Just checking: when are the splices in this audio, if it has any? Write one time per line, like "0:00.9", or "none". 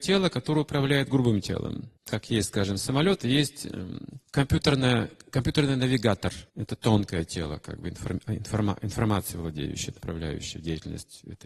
0:02.0
0:04.2
0:06.5